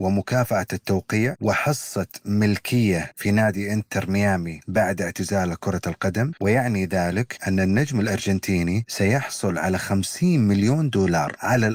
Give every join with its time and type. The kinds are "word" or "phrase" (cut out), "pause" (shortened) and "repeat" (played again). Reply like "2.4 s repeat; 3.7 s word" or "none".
none